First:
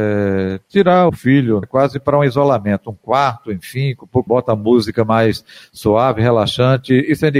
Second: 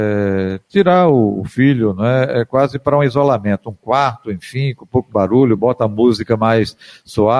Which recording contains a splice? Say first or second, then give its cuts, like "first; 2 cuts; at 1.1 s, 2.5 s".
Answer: first; 3 cuts; at 1.1 s, 1.6 s, 4.3 s